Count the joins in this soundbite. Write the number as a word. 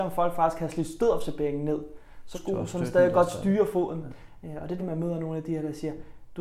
two